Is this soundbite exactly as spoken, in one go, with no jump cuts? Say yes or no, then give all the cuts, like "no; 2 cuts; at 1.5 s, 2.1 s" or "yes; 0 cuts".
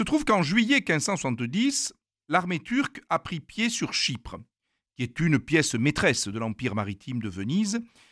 yes; 0 cuts